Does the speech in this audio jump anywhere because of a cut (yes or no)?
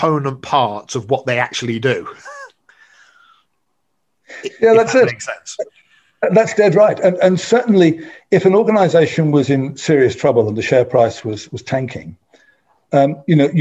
no